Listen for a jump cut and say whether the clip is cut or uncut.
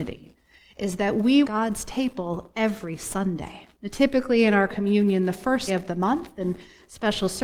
cut